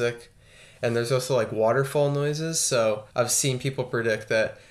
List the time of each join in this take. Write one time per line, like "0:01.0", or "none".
0:03.1